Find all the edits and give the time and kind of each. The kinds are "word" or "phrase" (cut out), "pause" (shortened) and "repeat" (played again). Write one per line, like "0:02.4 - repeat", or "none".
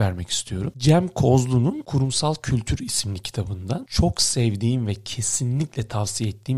none